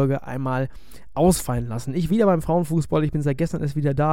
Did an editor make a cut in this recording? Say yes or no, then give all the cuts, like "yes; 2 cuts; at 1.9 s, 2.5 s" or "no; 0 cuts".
yes; 1 cut; at 2.1 s